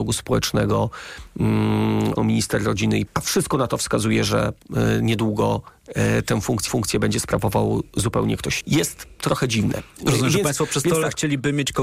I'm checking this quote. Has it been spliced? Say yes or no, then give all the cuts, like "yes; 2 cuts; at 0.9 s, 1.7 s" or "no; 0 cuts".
yes; 4 cuts; at 2.2 s, 3.1 s, 6.7 s, 8.6 s